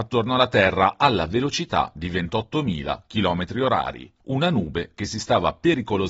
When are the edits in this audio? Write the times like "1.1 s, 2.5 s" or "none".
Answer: 4.2 s